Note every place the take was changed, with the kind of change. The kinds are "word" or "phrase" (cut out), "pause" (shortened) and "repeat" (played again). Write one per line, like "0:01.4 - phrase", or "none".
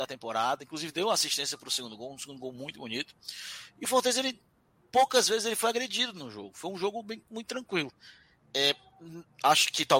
none